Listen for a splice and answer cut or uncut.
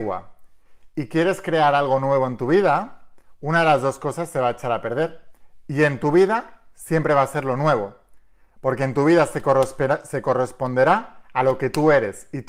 uncut